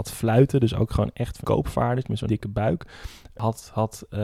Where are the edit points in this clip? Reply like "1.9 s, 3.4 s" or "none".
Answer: 1.4 s, 2.3 s